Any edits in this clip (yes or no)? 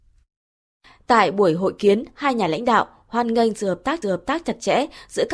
yes